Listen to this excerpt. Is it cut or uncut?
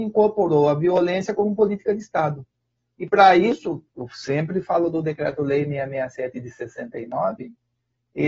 uncut